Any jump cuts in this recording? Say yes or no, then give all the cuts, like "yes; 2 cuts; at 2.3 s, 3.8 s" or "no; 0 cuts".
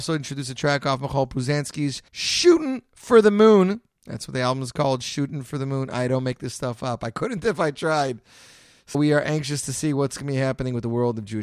yes; 2 cuts; at 2.1 s, 8.9 s